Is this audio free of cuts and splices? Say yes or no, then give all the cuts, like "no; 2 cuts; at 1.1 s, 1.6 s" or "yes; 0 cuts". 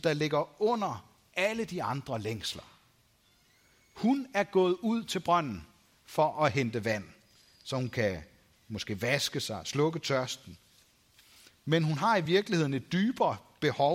yes; 0 cuts